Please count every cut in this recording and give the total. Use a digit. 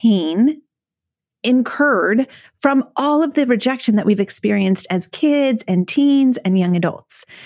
0